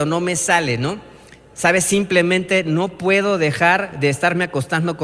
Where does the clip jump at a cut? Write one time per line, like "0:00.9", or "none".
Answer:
none